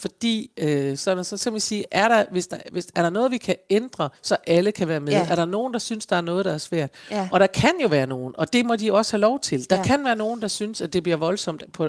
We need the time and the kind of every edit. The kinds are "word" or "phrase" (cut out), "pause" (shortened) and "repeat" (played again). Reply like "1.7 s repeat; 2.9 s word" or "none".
4.2 s pause